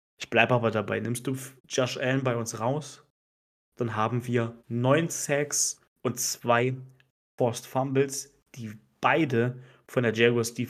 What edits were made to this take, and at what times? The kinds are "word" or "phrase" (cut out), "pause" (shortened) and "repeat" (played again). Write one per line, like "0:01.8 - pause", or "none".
0:01.6 - pause
0:04.6 - pause
0:05.9 - pause